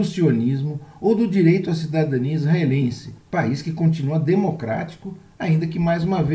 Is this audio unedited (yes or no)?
no